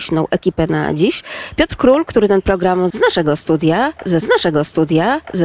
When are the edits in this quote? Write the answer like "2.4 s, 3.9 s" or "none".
2.9 s, 4.2 s